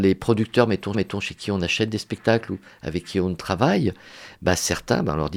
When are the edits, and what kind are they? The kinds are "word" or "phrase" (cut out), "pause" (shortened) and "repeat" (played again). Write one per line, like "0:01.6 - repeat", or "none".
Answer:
0:00.9 - repeat